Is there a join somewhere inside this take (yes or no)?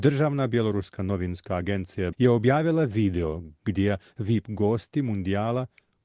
yes